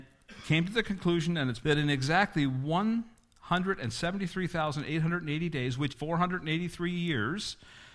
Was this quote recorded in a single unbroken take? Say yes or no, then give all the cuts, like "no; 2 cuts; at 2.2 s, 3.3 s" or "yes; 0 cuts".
no; 2 cuts; at 1.6 s, 5.9 s